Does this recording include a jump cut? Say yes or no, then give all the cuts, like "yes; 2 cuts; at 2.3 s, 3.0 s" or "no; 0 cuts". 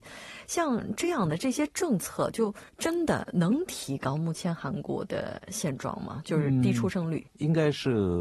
yes; 2 cuts; at 2.7 s, 7.3 s